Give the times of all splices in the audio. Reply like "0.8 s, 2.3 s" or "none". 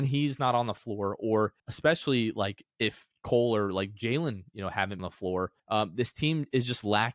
1.6 s, 2.7 s, 5.0 s, 5.6 s